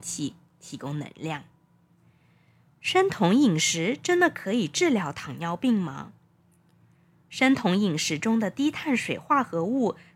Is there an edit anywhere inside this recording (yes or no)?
no